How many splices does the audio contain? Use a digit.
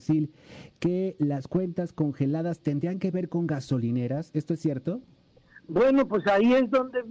0